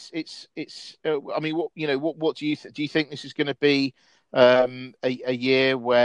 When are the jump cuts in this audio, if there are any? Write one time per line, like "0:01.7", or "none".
none